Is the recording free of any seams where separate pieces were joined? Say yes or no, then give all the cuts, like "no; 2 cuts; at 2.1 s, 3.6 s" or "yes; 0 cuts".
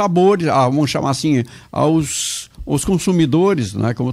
yes; 0 cuts